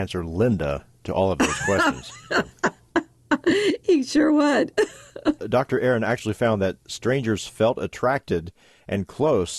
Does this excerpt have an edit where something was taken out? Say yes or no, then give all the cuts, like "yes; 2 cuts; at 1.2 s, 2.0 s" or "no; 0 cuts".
no; 0 cuts